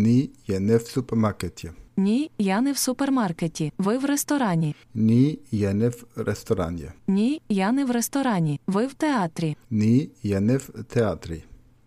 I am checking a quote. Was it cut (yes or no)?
yes